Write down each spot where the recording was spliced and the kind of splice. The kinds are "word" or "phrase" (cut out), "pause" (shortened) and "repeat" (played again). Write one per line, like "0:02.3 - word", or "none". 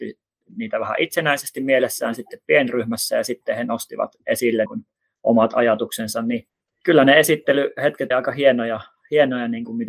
0:04.7 - word
0:08.1 - word